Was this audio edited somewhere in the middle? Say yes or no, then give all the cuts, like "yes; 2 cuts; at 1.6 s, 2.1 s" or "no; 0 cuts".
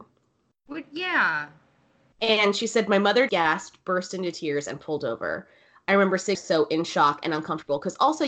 yes; 2 cuts; at 3.3 s, 6.3 s